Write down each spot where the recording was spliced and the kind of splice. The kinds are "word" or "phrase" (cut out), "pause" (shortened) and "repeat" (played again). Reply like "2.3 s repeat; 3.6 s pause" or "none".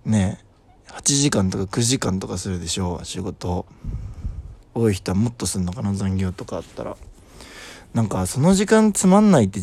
4.6 s pause